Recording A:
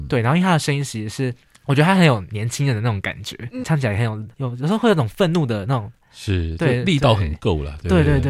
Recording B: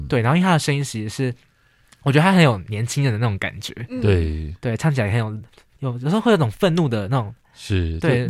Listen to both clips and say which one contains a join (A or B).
A